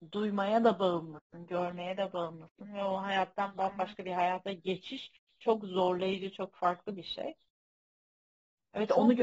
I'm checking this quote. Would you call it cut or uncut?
uncut